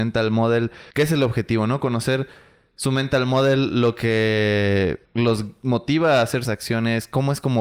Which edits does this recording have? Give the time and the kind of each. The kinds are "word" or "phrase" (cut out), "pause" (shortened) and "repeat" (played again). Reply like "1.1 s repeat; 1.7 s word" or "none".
0.9 s pause; 5.0 s pause; 6.4 s word